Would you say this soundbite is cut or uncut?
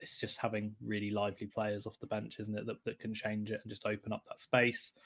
uncut